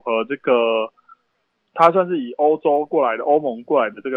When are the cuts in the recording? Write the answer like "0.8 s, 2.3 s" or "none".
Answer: none